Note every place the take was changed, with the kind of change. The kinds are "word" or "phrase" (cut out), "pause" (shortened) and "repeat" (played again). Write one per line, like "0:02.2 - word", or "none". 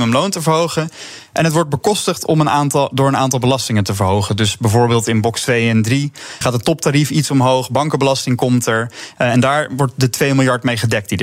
0:06.4 - word